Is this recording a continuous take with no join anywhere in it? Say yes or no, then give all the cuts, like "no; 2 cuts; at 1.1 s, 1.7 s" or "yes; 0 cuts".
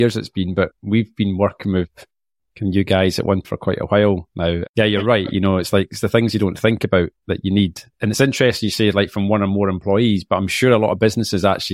no; 1 cut; at 3.4 s